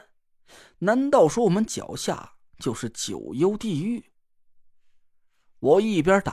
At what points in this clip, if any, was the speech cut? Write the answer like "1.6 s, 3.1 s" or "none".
none